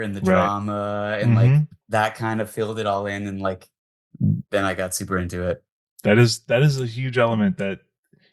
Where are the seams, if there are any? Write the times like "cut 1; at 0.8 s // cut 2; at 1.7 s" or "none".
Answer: cut 1; at 1.8 s